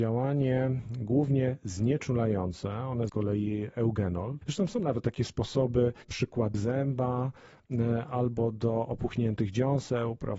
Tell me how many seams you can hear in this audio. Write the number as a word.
two